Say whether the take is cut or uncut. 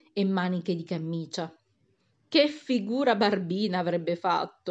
uncut